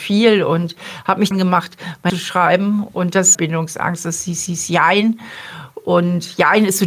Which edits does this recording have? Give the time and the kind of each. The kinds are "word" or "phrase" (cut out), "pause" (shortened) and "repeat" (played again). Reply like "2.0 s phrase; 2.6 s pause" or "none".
1.3 s phrase; 2.1 s phrase; 3.3 s phrase; 4.5 s repeat